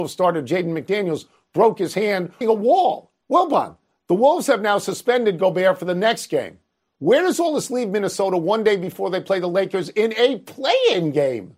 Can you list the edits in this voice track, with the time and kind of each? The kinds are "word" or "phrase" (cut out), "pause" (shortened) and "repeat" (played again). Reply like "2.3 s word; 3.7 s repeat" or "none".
2.4 s phrase; 3.2 s pause